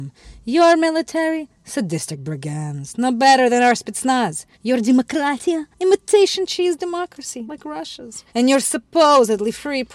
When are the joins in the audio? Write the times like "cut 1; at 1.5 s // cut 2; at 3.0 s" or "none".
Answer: cut 1; at 4.5 s // cut 2; at 5.7 s // cut 3; at 7.5 s // cut 4; at 8.3 s